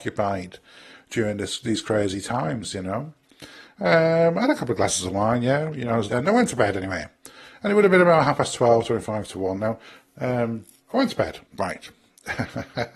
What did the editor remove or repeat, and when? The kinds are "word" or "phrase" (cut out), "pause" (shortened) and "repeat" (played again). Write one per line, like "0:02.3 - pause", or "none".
0:06.1 - phrase
0:11.5 - pause